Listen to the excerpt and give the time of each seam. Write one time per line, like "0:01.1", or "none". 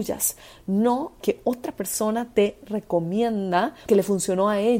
0:01.2
0:03.9